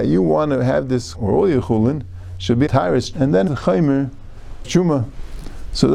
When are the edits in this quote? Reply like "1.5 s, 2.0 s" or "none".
1.1 s, 2.7 s, 3.1 s, 3.5 s, 4.6 s